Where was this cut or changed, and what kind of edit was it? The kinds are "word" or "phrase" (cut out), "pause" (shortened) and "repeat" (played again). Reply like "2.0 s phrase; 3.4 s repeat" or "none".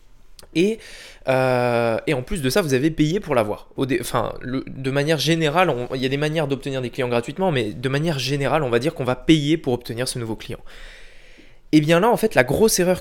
none

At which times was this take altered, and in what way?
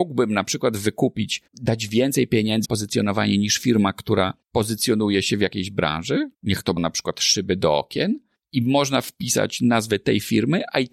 1.5 s pause; 2.6 s word; 4.4 s pause; 6.3 s pause; 6.8 s word; 8.3 s pause

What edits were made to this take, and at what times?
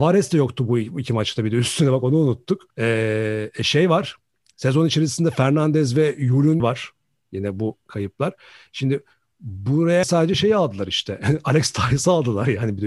2.7 s pause; 6.6 s word; 10.0 s phrase

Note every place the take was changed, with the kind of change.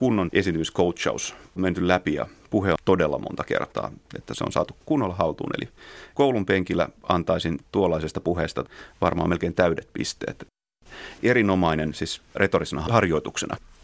2.8 s phrase

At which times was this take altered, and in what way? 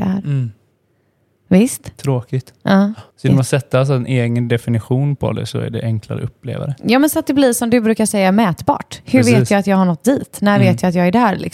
3.1 s pause

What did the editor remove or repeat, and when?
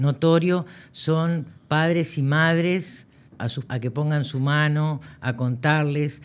1.6 s pause; 3.3 s word; 3.7 s word

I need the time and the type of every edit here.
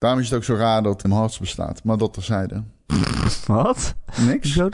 1.0 s word

